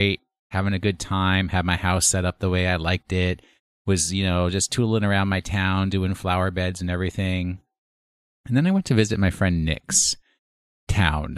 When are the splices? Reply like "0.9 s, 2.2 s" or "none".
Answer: none

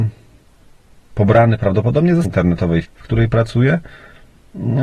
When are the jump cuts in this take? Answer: 2.2 s, 2.8 s

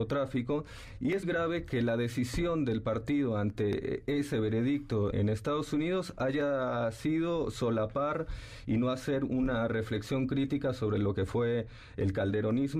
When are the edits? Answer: 1.2 s, 5.1 s

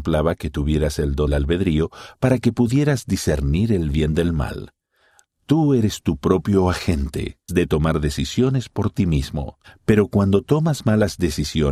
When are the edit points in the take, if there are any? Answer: 1.3 s, 7.5 s

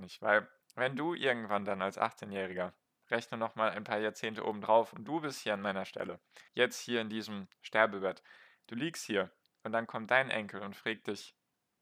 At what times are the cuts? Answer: 6.5 s

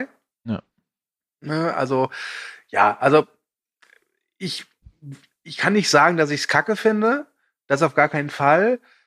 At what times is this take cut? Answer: none

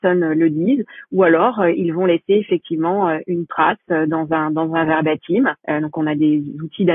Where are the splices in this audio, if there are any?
5.6 s

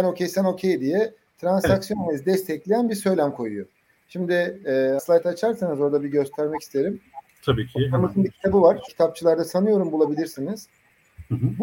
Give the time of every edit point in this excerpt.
5.0 s, 8.9 s

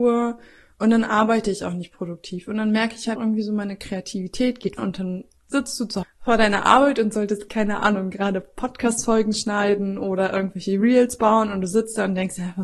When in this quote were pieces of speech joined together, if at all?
3.2 s, 4.8 s, 6.0 s, 7.5 s

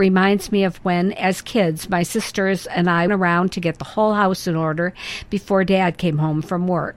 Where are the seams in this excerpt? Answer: 3.1 s

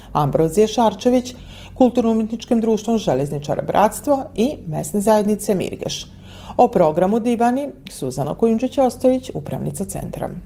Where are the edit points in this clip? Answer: none

